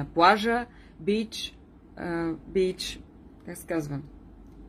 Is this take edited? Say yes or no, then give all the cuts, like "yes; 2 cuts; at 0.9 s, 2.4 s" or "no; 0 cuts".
no; 0 cuts